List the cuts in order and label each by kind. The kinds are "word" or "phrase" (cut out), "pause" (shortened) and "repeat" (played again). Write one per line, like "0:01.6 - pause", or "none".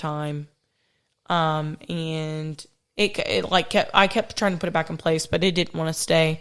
none